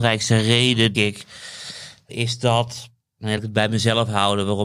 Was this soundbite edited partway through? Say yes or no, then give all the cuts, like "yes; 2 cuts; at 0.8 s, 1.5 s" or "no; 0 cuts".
yes; 3 cuts; at 0.9 s, 2.1 s, 3.4 s